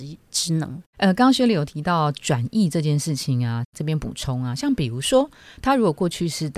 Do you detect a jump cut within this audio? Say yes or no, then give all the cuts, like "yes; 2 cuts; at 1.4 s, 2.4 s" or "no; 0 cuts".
no; 0 cuts